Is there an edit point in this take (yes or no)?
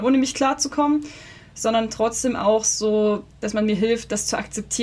no